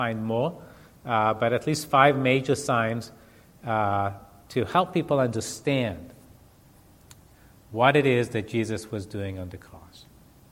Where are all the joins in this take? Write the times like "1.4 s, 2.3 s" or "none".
none